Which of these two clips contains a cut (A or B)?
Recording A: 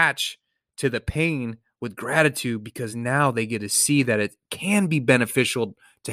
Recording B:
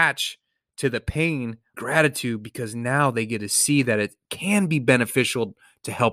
B